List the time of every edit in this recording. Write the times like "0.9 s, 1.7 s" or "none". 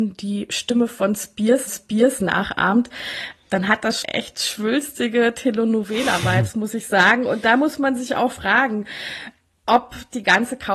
1.7 s, 4.0 s